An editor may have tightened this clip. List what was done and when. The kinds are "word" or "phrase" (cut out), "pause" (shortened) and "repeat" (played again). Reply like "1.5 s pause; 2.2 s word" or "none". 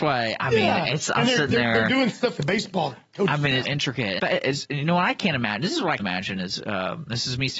2.4 s word; 3.6 s word; 4.2 s word; 6.0 s word